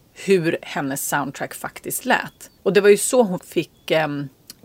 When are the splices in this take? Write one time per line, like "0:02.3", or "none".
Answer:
0:02.6
0:03.4